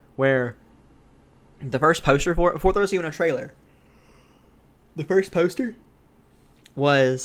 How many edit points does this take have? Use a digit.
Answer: 0